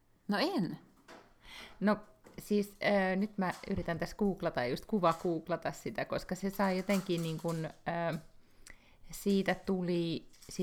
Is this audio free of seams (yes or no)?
yes